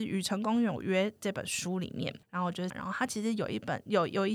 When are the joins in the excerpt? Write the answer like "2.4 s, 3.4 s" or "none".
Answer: 2.2 s, 2.7 s